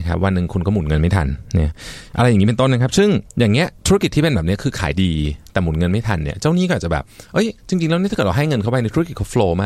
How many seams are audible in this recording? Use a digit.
3